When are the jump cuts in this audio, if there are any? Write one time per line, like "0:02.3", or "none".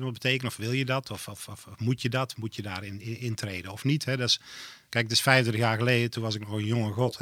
none